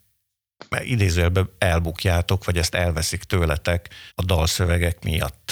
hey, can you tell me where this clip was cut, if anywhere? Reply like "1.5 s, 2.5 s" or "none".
4.1 s